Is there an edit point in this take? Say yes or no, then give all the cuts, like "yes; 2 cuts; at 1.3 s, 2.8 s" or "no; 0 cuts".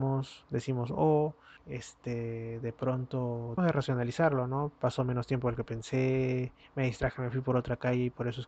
yes; 2 cuts; at 1.6 s, 3.6 s